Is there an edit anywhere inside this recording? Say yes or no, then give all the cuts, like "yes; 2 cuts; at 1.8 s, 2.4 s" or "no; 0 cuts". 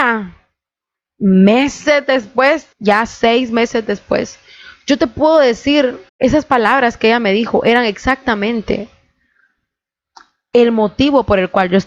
yes; 2 cuts; at 2.7 s, 6.1 s